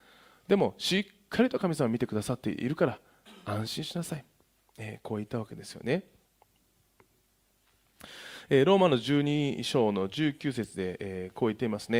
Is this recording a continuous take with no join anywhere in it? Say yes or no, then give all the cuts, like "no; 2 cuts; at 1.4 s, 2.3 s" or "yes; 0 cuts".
yes; 0 cuts